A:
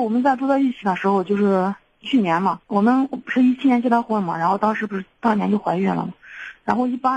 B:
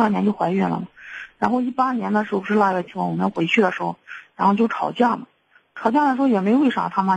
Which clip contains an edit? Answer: A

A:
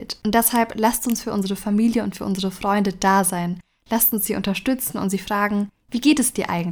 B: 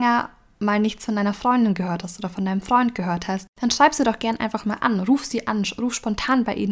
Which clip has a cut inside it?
B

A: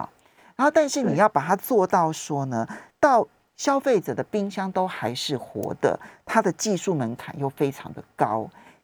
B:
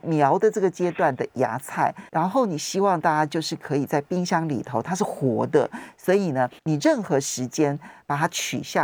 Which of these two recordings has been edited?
B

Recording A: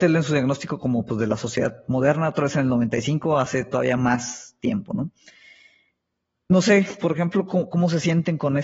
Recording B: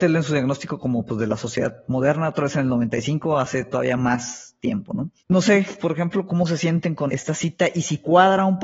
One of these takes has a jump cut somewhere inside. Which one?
B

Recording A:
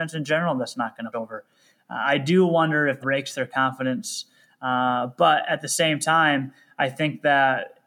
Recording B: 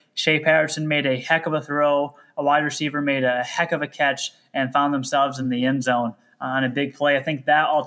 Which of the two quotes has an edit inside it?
A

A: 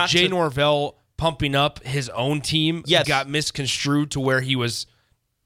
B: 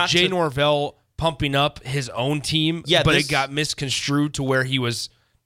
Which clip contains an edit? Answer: A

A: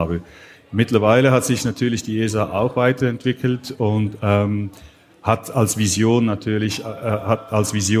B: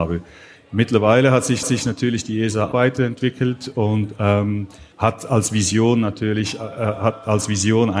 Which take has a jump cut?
B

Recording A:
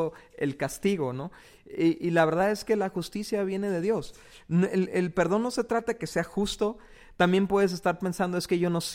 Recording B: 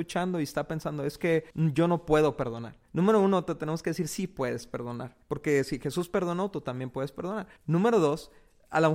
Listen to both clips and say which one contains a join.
B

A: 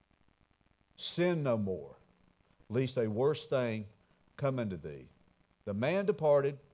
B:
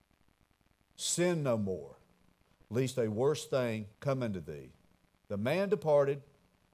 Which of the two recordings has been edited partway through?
B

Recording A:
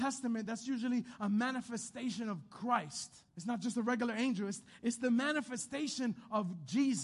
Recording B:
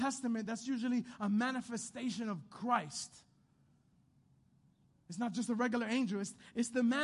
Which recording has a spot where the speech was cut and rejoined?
A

